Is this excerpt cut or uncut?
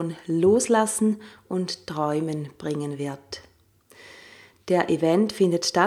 uncut